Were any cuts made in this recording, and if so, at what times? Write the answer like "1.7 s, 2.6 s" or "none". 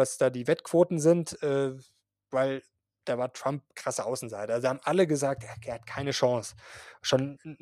none